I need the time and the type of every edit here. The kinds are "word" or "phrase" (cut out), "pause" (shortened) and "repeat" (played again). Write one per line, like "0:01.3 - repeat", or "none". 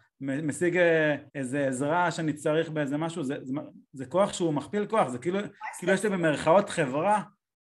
0:01.3 - pause